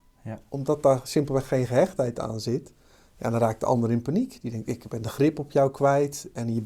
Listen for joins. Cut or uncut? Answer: uncut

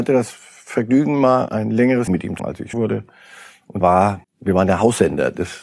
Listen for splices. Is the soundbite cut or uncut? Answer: cut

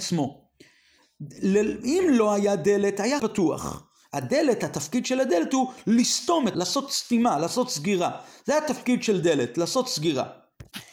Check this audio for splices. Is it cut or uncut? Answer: cut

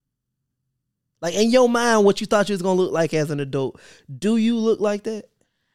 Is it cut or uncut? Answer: uncut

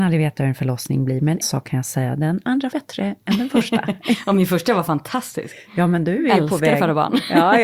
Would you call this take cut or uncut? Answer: cut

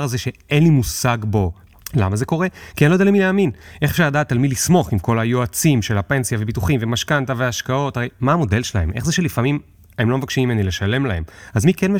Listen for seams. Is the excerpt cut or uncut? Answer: uncut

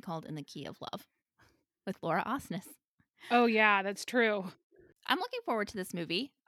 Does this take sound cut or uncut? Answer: uncut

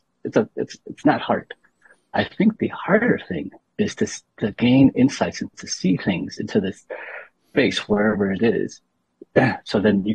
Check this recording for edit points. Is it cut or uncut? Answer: uncut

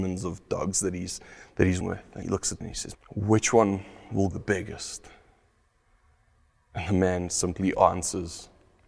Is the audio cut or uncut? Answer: cut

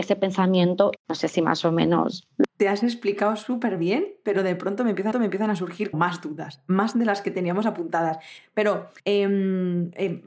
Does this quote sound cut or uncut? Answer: cut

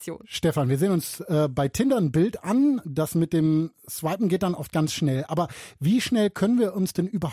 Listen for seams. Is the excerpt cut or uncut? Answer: uncut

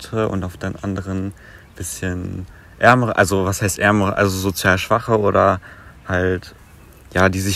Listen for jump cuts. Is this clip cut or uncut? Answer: uncut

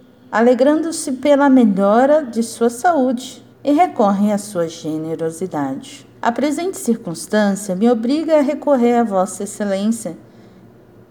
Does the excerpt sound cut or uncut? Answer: cut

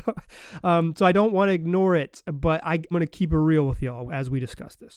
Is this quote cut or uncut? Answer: cut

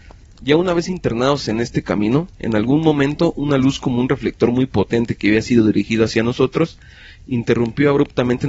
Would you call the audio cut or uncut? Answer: uncut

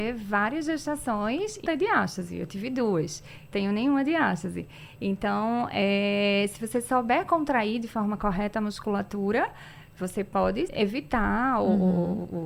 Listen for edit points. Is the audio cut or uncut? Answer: cut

